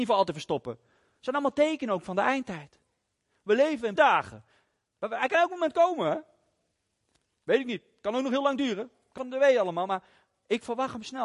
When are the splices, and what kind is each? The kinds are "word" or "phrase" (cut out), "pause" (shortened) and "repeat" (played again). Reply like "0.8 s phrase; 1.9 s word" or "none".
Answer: 4.0 s word; 9.2 s phrase